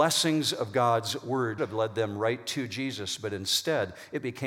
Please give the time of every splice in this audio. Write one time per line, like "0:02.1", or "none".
0:01.6

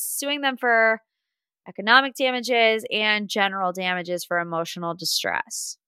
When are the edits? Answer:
none

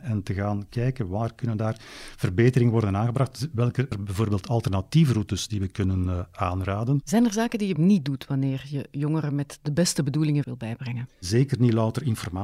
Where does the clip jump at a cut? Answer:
0:03.9
0:07.8
0:10.4

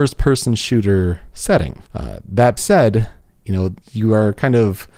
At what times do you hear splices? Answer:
0:01.9
0:02.6
0:03.8

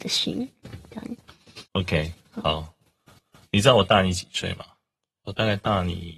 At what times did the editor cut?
0:01.7
0:03.2

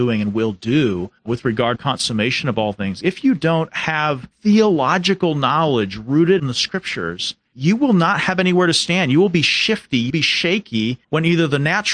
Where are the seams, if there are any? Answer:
0:01.2
0:01.8
0:04.3
0:06.4
0:07.5
0:10.1
0:11.0

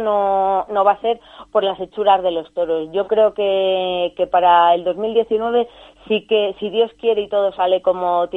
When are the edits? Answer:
none

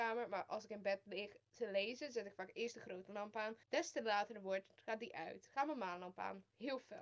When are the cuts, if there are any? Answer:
0:03.6

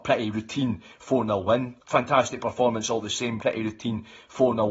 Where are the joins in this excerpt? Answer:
0:01.8
0:03.4

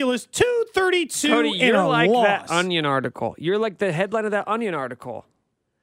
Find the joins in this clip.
none

